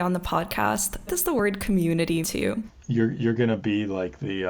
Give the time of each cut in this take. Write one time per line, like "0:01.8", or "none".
0:01.1
0:02.2